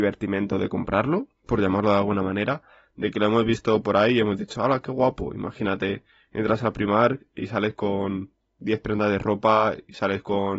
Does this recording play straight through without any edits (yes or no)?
yes